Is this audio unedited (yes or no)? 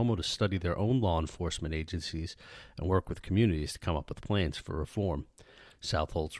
yes